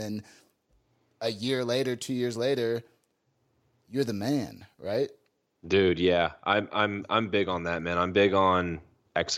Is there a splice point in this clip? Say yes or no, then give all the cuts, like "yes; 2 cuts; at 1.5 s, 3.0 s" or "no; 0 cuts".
no; 0 cuts